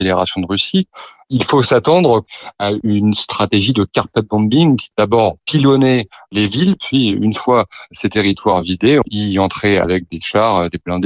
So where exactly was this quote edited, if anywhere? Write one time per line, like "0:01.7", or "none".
none